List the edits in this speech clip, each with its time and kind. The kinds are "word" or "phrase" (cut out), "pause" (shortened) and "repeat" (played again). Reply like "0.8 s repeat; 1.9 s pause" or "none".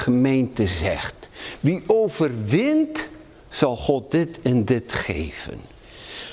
none